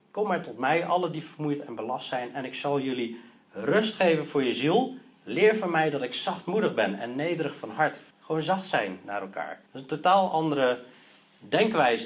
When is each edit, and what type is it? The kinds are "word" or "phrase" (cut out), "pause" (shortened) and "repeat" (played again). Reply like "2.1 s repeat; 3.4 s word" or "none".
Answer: 8.1 s pause; 9.7 s pause